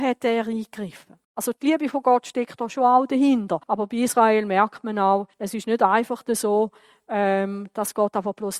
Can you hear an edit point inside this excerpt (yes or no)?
yes